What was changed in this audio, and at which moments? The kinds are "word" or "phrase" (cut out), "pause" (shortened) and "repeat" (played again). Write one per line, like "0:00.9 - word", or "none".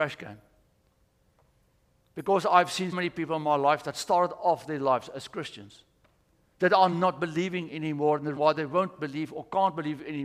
0:02.9 - word
0:06.9 - word
0:08.4 - word

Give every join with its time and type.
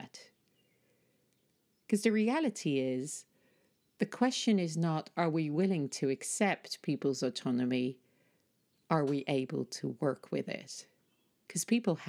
none

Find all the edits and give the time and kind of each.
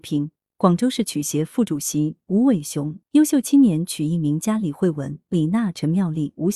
0:03.0 - phrase

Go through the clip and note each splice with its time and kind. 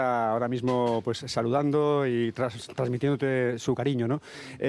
none

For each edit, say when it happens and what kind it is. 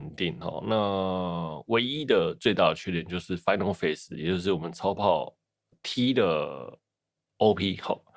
none

